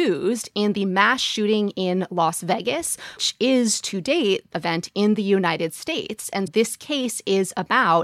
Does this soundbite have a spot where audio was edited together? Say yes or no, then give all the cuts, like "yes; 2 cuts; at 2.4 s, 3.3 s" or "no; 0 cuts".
yes; 3 cuts; at 3.2 s, 4.5 s, 6.5 s